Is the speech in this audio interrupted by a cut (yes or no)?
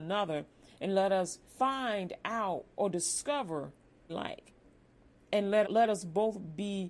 yes